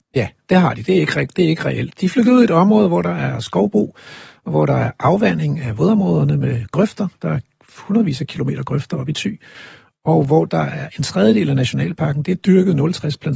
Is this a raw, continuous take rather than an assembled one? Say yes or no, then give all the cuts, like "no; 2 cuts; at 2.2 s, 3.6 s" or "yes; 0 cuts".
yes; 0 cuts